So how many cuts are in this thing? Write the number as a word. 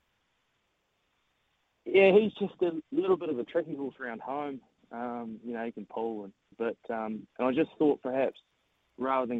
two